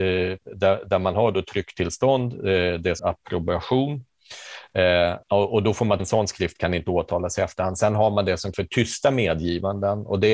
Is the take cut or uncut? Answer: cut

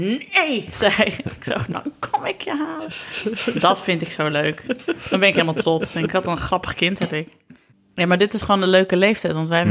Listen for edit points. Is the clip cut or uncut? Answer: uncut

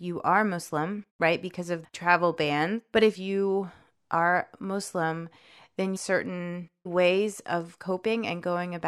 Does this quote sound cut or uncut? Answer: cut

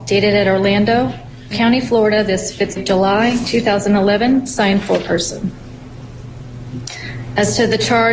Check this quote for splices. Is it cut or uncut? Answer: cut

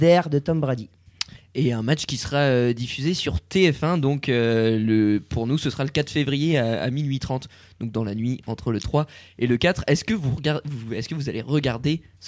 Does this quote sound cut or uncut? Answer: uncut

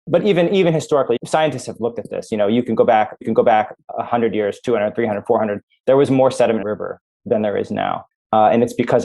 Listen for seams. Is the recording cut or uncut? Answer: cut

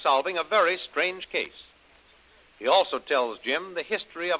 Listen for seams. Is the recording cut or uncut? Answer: uncut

